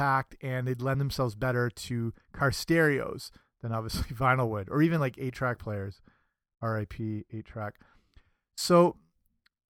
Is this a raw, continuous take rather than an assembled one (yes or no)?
yes